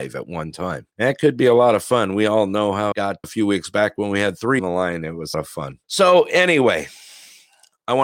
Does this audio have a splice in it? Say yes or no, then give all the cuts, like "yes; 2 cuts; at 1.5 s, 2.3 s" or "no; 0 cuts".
yes; 6 cuts; at 0.9 s, 2.9 s, 3.2 s, 4.6 s, 5.3 s, 5.8 s